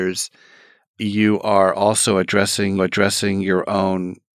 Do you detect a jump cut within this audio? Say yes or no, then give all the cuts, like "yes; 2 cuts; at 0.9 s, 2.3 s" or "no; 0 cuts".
yes; 1 cut; at 2.8 s